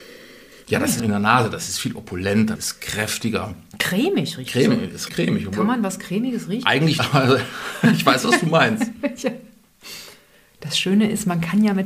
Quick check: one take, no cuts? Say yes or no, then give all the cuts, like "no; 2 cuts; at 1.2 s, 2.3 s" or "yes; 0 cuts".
no; 4 cuts; at 1.0 s, 2.6 s, 5.1 s, 7.0 s